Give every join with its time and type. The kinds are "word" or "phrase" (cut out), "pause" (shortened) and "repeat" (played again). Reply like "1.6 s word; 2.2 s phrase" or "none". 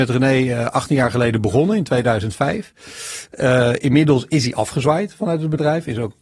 none